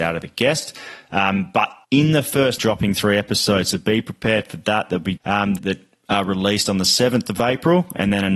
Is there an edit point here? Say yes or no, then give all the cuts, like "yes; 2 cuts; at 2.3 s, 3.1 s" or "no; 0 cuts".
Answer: yes; 4 cuts; at 1.8 s, 2.6 s, 5.2 s, 5.6 s